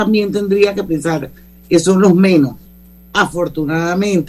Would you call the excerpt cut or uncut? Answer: uncut